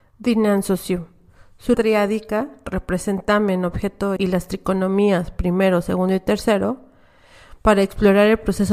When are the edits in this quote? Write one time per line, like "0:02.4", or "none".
0:01.7
0:04.2